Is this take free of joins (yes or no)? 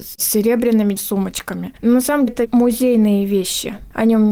no